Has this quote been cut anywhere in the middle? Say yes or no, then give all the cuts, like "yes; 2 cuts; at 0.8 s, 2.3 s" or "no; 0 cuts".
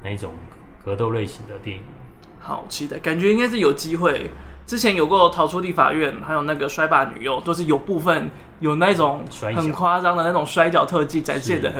no; 0 cuts